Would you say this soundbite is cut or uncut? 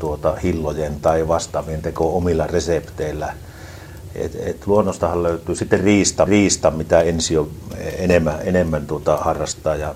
cut